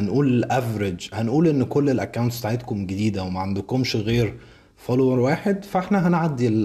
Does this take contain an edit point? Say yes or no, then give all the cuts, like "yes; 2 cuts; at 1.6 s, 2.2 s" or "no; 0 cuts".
no; 0 cuts